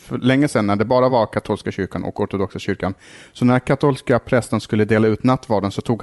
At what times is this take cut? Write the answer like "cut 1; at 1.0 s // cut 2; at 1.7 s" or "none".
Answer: none